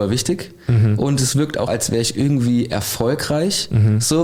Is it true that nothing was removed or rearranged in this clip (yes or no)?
no